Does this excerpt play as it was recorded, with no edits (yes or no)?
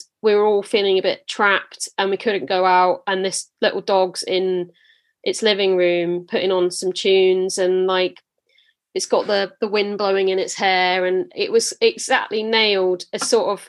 yes